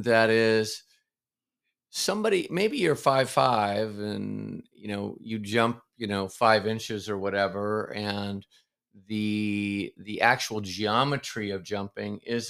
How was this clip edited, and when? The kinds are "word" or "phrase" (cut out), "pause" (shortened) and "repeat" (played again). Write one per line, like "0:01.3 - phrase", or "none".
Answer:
none